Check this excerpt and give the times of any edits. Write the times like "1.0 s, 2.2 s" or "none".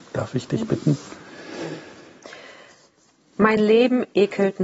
none